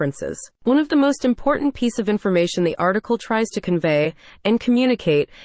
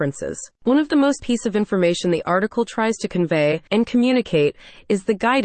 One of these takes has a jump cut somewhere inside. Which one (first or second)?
second